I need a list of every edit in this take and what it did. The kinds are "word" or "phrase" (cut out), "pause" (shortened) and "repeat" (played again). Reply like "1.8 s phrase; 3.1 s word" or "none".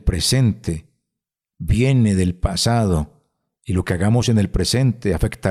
none

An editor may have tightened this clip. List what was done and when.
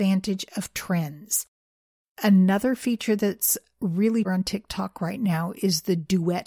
4.2 s word

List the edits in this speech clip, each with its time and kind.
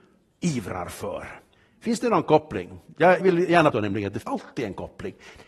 1.5 s pause; 3.2 s word; 3.7 s word; 4.2 s word

